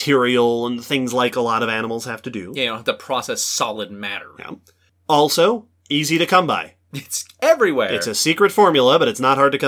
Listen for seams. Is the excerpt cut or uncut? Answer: uncut